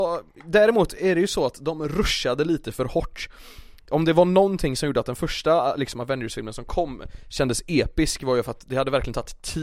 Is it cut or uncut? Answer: uncut